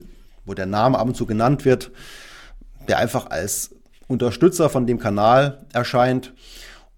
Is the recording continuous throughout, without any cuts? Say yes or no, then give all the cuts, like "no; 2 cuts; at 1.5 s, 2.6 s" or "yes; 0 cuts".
yes; 0 cuts